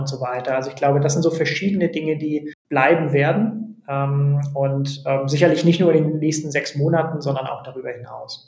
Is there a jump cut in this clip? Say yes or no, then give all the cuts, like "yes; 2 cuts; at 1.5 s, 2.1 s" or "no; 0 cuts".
yes; 1 cut; at 2.6 s